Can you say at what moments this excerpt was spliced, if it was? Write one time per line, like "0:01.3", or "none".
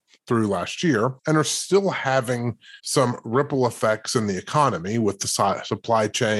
0:01.2
0:02.8